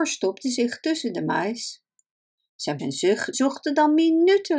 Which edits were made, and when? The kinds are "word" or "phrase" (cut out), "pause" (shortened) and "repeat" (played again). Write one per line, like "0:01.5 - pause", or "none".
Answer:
0:02.8 - word
0:03.3 - word